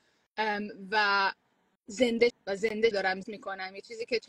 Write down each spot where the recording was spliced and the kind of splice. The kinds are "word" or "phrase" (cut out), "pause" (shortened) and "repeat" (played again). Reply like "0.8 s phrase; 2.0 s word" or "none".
2.3 s word; 2.9 s phrase; 3.2 s word